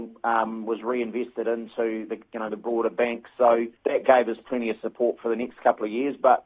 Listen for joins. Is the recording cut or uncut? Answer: cut